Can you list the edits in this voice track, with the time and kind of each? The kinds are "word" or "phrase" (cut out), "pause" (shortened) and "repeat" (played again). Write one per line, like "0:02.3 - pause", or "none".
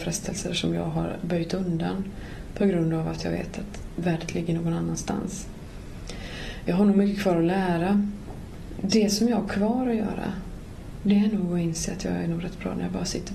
none